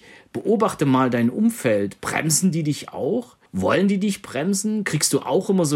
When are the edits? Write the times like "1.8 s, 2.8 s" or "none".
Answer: 3.5 s